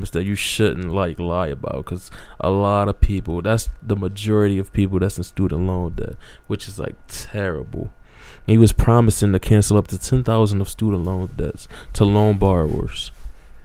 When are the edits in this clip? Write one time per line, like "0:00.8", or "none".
none